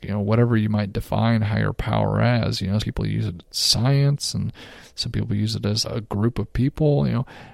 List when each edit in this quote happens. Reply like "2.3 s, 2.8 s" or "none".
2.8 s, 5.8 s